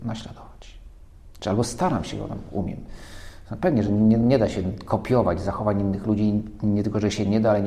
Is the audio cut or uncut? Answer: uncut